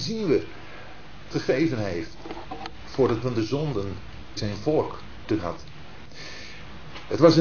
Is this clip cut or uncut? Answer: cut